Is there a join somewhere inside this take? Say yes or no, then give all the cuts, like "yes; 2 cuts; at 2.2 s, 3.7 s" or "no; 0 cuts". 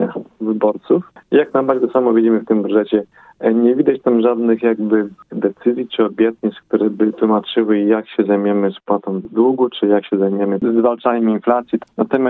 yes; 1 cut; at 5.3 s